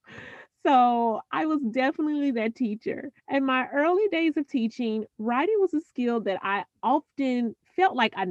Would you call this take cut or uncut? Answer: cut